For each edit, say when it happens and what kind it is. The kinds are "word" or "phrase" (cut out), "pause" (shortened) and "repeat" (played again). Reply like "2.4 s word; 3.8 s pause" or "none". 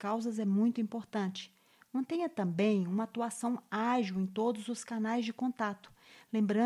none